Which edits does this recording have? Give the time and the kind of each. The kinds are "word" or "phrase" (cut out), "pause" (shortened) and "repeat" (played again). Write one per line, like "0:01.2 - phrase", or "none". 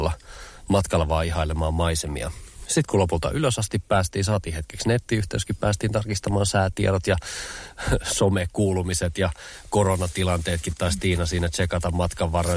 none